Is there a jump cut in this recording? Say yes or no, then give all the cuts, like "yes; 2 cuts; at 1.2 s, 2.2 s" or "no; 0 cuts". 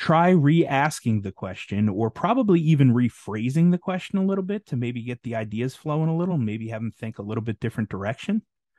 no; 0 cuts